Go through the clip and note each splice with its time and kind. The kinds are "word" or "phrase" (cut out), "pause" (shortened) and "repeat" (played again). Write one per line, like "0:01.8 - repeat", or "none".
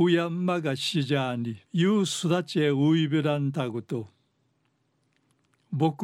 0:01.7 - pause